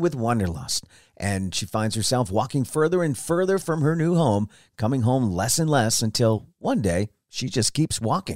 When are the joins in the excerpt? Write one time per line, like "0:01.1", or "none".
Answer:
none